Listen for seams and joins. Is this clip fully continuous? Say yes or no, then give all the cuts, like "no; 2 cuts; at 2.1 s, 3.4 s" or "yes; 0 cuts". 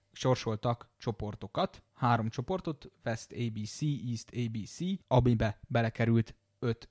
no; 2 cuts; at 1.9 s, 5.0 s